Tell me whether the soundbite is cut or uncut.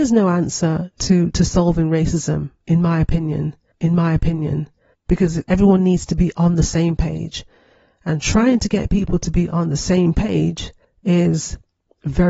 cut